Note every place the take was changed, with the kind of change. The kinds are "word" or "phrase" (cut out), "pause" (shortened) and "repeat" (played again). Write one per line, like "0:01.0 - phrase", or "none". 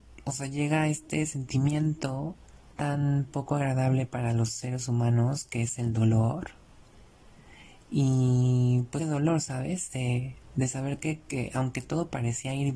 0:02.7 - word
0:09.0 - phrase